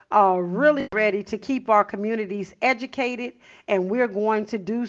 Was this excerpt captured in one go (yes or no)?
yes